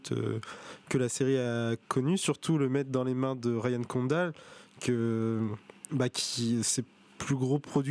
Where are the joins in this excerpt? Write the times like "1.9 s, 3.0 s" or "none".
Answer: none